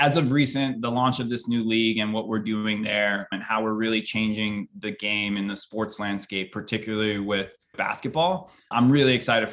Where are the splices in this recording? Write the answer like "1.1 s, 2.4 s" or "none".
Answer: none